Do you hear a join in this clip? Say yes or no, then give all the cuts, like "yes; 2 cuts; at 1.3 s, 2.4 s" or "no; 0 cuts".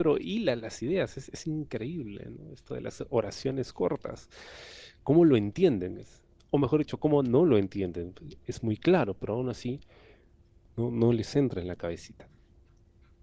no; 0 cuts